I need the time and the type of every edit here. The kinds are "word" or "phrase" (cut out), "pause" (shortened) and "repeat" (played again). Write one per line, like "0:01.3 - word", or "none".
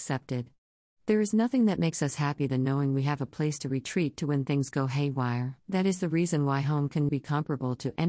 0:05.6 - pause
0:07.1 - word